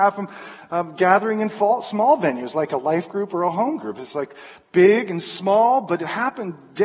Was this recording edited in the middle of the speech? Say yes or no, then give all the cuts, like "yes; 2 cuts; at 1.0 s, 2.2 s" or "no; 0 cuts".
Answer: no; 0 cuts